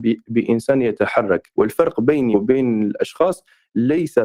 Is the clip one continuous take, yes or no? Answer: no